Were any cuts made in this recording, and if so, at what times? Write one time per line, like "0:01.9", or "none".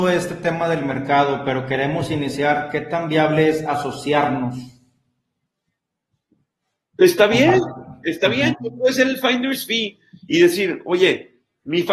none